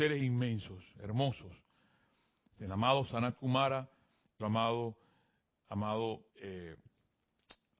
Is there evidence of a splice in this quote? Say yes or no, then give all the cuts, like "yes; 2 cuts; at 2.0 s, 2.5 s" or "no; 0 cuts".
yes; 2 cuts; at 4.4 s, 6.3 s